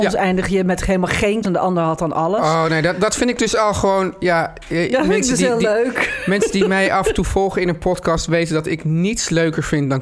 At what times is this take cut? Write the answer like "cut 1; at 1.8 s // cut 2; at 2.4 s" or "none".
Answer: cut 1; at 1.4 s